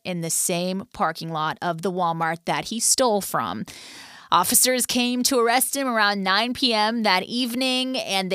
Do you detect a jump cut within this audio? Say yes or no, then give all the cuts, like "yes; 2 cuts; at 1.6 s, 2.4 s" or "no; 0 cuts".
no; 0 cuts